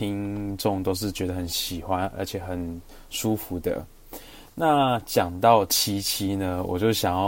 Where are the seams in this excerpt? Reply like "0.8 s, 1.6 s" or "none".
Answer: none

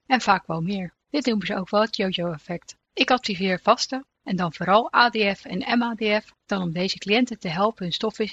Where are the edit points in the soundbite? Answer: 1.0 s, 2.8 s, 4.1 s, 6.4 s

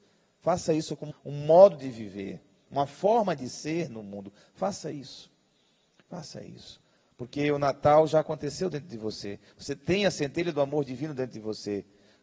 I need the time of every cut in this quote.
1.1 s

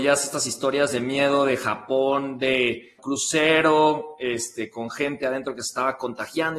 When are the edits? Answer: 3.0 s

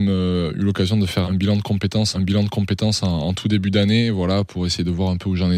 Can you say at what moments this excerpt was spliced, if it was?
1.2 s, 2.1 s

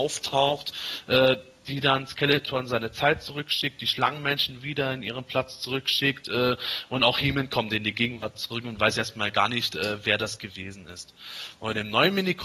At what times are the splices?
none

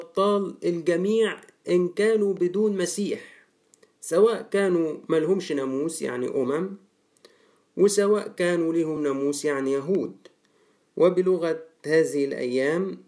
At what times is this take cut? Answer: none

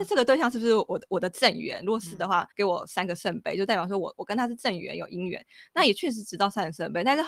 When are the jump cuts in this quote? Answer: 2.5 s

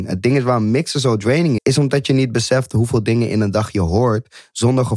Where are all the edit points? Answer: 1.6 s

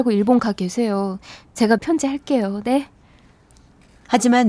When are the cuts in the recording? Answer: 1.8 s

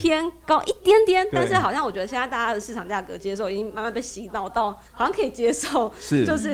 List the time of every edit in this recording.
4.9 s

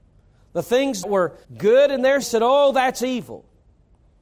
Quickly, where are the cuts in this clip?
1.0 s, 1.4 s, 2.2 s

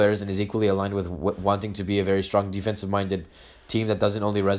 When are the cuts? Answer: none

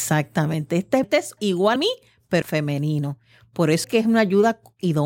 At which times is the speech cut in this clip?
1.0 s, 1.4 s, 1.8 s, 2.4 s, 3.8 s

